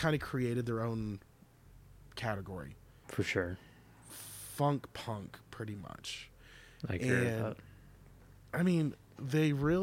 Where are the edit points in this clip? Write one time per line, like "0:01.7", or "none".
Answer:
0:03.0